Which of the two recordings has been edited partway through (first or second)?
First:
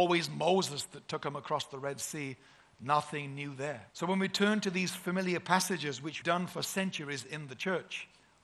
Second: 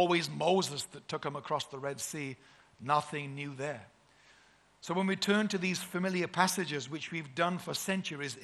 first